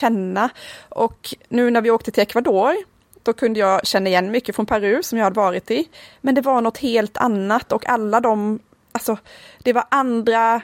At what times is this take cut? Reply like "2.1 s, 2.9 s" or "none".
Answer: none